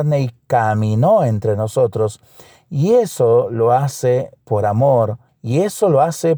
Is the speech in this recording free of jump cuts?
no; 2 cuts; at 4.4 s, 5.3 s

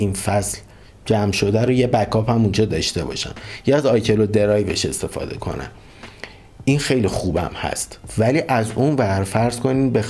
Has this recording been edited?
no; 0 cuts

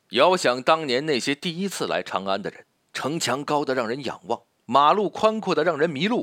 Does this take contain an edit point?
yes; 2 cuts; at 2.8 s, 4.5 s

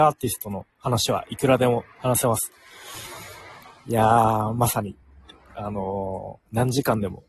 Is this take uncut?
yes; 0 cuts

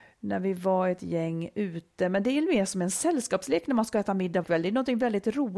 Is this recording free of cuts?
no; 1 cut; at 4.4 s

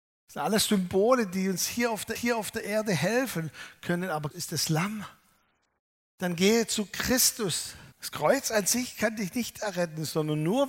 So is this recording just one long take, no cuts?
no; 3 cuts; at 2.1 s, 4.3 s, 7.9 s

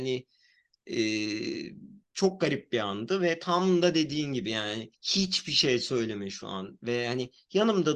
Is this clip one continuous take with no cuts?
no; 2 cuts; at 2.0 s, 4.9 s

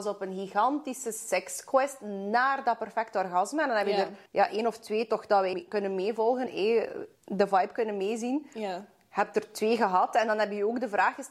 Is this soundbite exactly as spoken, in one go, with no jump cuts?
no; 4 cuts; at 4.3 s, 5.5 s, 6.5 s, 7.2 s

